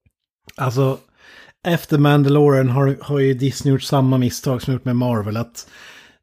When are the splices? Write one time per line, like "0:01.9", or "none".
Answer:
none

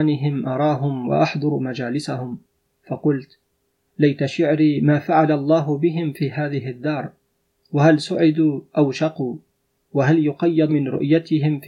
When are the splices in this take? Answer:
0:10.7

